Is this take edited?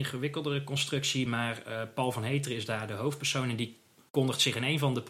no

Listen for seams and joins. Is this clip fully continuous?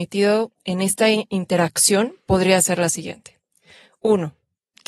yes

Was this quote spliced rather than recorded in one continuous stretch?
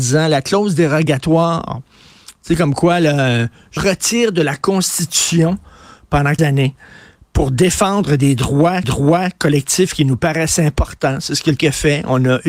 yes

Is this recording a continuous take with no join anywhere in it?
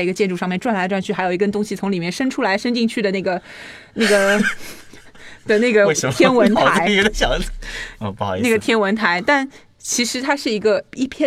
yes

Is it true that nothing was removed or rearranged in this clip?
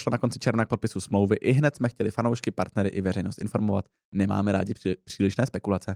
yes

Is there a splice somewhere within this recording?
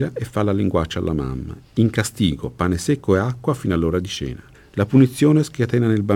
yes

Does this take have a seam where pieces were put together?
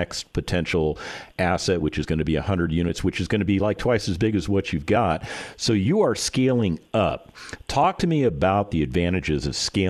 no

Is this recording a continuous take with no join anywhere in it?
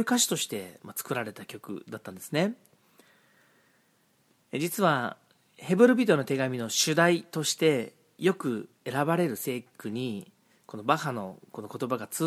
yes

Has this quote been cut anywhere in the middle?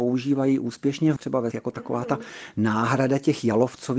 yes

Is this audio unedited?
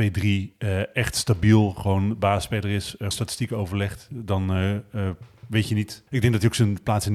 no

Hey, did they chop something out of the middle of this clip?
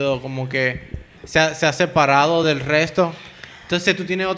no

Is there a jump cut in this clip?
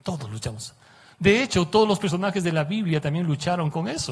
no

